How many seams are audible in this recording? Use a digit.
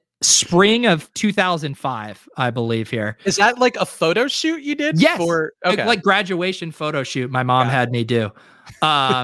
0